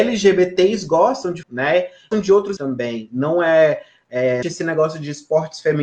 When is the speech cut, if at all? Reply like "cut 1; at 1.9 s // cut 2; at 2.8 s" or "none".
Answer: cut 1; at 1.4 s // cut 2; at 2.1 s // cut 3; at 2.6 s // cut 4; at 4.4 s